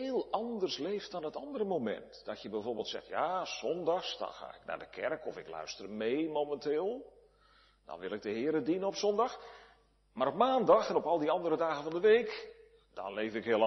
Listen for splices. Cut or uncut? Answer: uncut